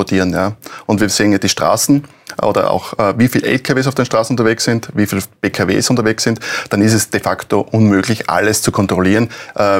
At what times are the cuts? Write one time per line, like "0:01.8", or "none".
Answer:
none